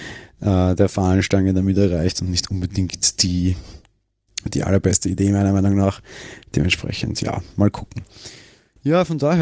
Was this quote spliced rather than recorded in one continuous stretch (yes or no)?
no